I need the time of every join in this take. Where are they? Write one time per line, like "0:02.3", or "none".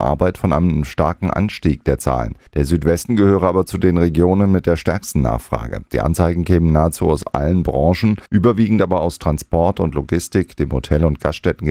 0:02.5
0:08.3